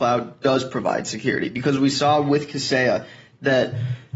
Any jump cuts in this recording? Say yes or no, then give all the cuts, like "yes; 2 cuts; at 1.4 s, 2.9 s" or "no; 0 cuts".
no; 0 cuts